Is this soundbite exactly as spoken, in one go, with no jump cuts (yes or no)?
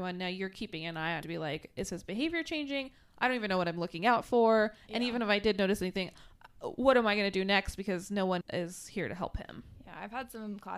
no